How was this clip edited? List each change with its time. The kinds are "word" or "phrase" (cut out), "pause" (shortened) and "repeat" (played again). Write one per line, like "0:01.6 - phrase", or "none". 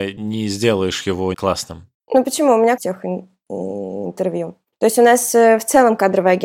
0:01.3 - word
0:02.8 - phrase